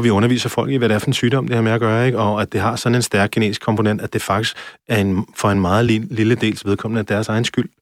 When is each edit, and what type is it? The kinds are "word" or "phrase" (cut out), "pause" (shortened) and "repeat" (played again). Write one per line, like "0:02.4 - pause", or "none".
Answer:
none